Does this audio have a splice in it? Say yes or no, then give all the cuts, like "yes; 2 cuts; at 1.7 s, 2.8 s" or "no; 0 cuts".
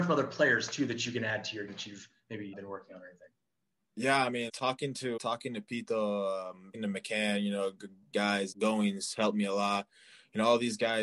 yes; 7 cuts; at 1.7 s, 2.5 s, 4.5 s, 5.2 s, 6.7 s, 8.1 s, 8.5 s